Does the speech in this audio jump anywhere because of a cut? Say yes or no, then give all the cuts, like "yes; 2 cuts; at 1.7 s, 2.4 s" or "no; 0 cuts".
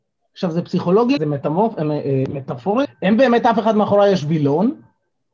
yes; 2 cuts; at 1.2 s, 2.8 s